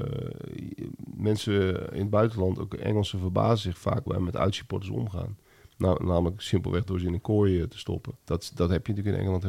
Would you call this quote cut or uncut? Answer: cut